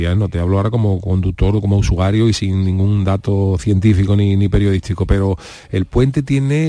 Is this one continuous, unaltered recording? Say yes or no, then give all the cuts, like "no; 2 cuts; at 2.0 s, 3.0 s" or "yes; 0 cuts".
yes; 0 cuts